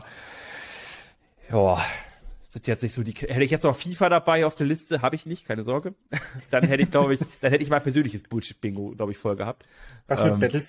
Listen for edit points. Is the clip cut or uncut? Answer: uncut